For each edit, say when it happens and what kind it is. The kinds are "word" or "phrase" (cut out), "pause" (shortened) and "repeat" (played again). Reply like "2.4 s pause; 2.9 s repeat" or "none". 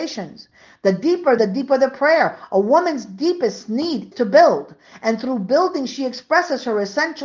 1.4 s phrase; 4.1 s word